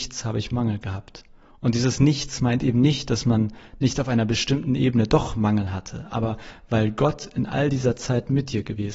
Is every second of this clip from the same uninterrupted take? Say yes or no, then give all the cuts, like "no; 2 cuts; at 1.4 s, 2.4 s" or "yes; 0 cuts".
yes; 0 cuts